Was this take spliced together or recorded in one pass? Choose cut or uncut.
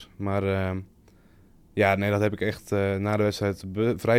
uncut